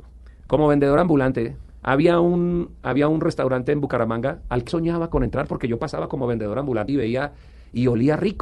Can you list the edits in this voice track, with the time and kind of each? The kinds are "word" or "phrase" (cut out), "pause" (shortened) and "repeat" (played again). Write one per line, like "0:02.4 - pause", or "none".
0:04.7 - word
0:06.9 - word